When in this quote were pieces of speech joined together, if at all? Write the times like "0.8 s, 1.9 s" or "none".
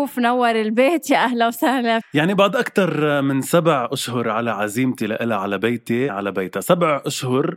2.0 s, 6.1 s